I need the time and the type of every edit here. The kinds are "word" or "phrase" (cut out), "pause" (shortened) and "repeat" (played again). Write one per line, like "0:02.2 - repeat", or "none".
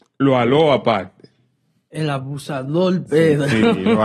none

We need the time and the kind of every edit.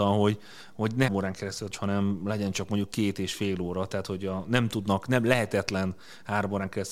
0:01.1 - word
0:01.7 - phrase

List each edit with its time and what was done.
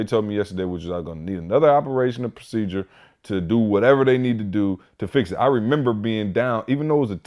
none

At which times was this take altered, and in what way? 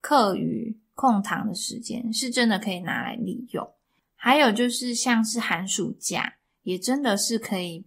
none

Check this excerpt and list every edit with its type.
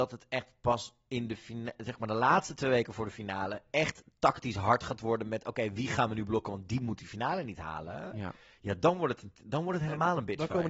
none

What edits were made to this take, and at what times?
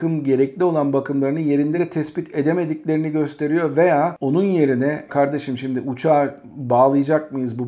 0:05.1 - word

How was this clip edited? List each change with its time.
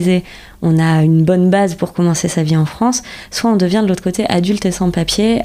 none

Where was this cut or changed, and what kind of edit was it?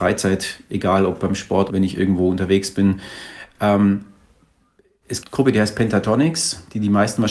0:01.7 - word
0:05.2 - phrase

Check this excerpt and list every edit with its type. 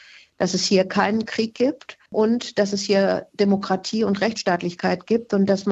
0:02.1 - pause

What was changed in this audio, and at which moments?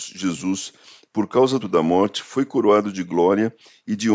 0:01.6 - word

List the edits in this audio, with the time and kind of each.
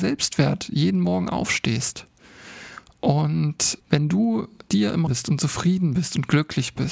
0:03.8 - word
0:04.7 - word
0:05.1 - word

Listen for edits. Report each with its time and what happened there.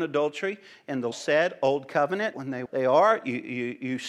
0:01.1 - word
0:02.3 - word
0:02.7 - word

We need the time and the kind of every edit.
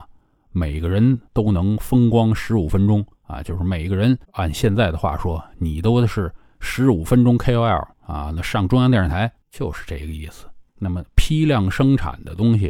0:01.3 - pause
0:03.1 - pause
0:04.2 - pause
0:07.9 - pause
0:09.4 - pause
0:10.7 - pause

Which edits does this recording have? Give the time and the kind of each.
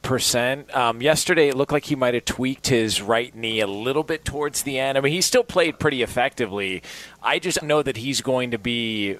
0:07.6 - phrase

